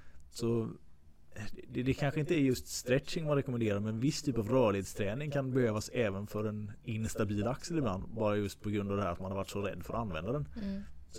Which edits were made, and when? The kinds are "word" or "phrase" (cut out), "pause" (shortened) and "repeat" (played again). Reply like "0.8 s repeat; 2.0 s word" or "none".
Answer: none